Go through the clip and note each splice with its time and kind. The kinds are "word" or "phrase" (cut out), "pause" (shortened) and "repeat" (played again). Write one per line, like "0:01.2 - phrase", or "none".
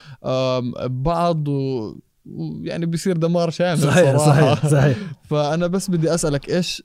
none